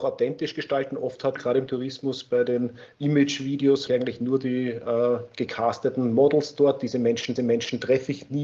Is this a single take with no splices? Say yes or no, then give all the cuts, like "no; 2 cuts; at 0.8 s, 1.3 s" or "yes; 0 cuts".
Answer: no; 3 cuts; at 1.4 s, 3.9 s, 7.4 s